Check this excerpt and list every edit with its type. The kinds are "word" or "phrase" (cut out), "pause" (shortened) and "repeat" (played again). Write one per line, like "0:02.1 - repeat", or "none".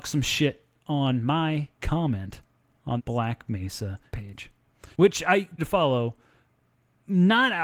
0:01.8 - word
0:03.0 - word
0:04.1 - word
0:04.9 - pause
0:05.6 - word